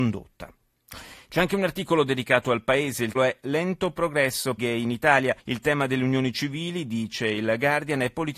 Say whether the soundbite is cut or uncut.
cut